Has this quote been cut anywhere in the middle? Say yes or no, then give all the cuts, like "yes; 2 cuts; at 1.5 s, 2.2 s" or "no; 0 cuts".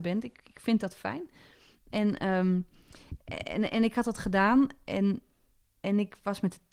no; 0 cuts